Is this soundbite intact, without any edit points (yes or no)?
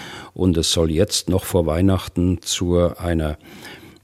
yes